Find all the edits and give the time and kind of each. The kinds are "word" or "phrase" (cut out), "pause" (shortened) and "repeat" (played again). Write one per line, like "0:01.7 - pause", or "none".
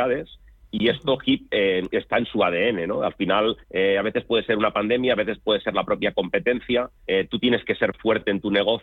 0:03.6 - pause
0:07.0 - pause